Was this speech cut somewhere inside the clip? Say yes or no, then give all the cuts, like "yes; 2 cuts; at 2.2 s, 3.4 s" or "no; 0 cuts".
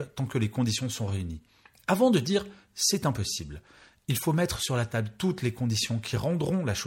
no; 0 cuts